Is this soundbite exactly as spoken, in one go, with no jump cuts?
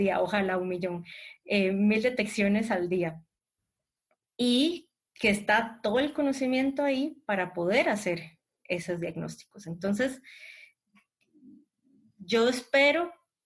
yes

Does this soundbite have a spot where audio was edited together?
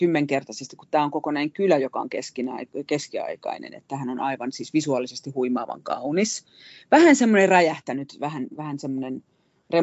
no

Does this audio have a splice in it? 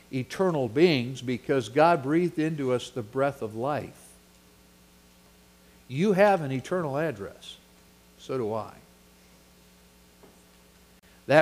no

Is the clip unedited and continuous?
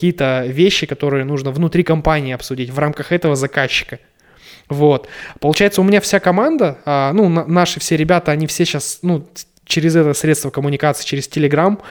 yes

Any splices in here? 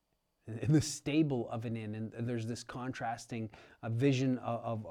no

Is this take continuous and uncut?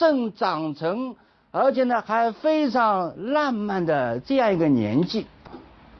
yes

